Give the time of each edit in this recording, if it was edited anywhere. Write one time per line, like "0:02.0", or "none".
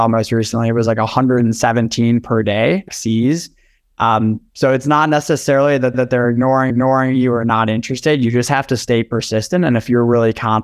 0:02.9
0:05.9
0:06.7